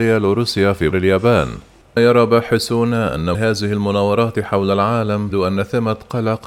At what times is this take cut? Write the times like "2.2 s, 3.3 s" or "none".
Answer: 0.9 s, 2.0 s, 3.3 s, 5.3 s